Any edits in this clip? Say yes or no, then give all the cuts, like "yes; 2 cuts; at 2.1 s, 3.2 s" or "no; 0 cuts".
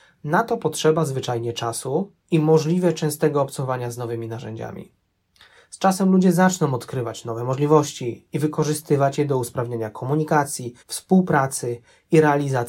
yes; 2 cuts; at 2.2 s, 10.8 s